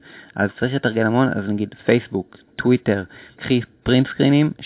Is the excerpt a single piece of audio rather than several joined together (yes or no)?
yes